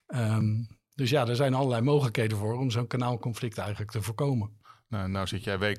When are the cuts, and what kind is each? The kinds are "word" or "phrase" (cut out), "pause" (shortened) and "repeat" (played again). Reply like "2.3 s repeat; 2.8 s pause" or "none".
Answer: none